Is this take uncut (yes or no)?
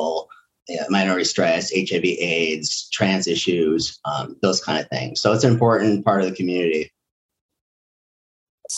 yes